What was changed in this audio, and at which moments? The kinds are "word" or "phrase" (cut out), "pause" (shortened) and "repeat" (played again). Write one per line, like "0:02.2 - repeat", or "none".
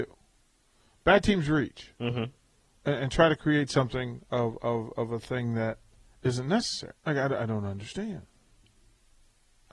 0:07.0 - pause